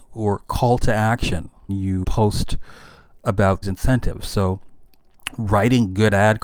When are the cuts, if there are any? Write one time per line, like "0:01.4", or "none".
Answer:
0:01.7
0:02.0
0:03.6